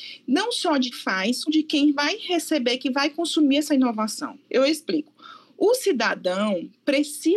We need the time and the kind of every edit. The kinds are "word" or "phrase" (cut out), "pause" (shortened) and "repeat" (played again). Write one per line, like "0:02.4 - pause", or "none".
0:00.9 - word
0:01.5 - word
0:04.4 - pause